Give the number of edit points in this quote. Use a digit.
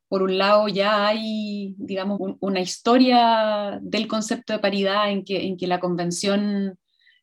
1